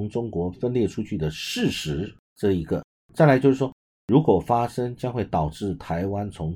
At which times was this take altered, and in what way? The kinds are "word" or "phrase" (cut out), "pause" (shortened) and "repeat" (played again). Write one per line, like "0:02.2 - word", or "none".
0:02.2 - pause